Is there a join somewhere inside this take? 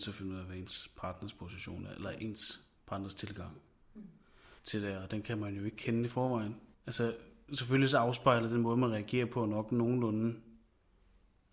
yes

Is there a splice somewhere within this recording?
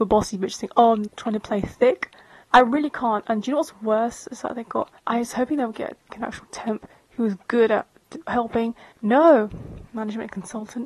yes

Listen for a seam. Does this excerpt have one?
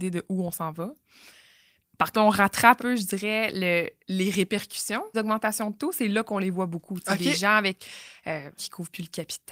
yes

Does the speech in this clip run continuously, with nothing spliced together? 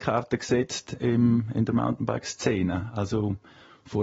yes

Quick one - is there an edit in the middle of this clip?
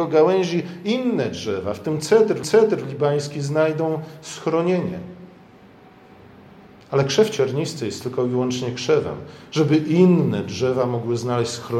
yes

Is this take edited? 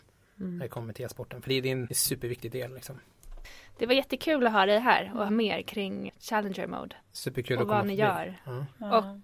yes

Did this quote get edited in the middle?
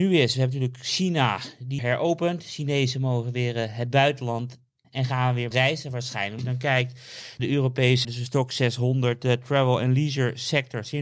yes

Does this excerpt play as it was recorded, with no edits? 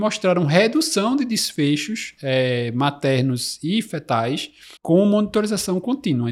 no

